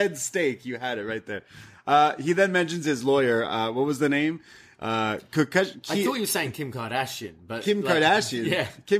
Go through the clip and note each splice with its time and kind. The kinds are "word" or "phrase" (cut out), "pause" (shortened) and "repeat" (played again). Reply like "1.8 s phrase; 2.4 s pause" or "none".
none